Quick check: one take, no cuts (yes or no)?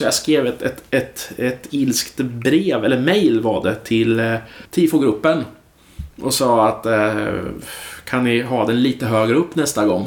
no